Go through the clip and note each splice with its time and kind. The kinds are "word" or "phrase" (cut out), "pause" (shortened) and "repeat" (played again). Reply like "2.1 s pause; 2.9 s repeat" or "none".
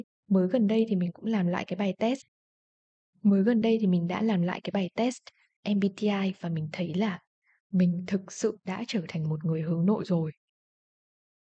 none